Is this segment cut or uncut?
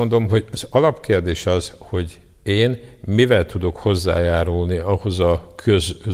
uncut